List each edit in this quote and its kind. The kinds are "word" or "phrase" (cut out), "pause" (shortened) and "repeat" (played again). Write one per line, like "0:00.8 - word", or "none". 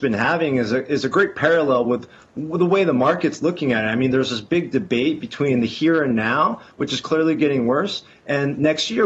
none